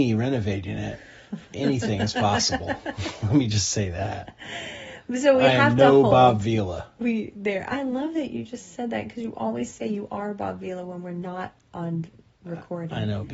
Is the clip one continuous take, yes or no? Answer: yes